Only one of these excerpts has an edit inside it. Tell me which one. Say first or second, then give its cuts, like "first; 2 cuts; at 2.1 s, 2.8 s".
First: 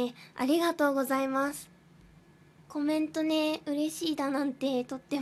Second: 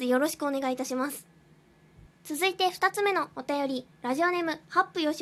second; 2 cuts; at 2.1 s, 3.9 s